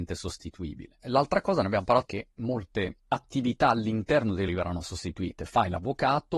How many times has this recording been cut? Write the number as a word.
two